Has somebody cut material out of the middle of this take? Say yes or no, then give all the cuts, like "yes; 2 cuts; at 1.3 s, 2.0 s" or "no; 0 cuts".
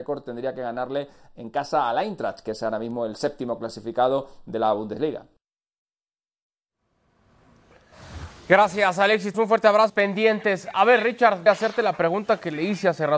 yes; 3 cuts; at 9.3 s, 9.9 s, 11.5 s